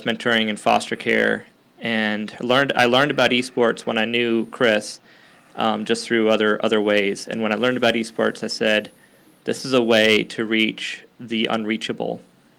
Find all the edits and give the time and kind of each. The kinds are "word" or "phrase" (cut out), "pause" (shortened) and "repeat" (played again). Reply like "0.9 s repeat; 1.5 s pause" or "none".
none